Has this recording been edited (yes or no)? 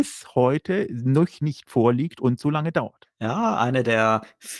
no